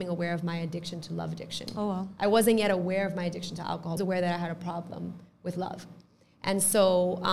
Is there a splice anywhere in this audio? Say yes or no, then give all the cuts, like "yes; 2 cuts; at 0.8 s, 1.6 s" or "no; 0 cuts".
yes; 1 cut; at 4.0 s